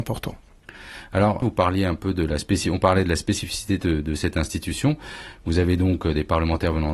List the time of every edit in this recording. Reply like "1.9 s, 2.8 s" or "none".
none